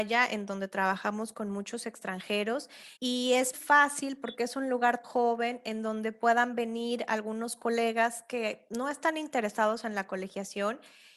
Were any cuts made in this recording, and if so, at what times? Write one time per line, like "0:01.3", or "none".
0:03.0
0:03.5
0:05.0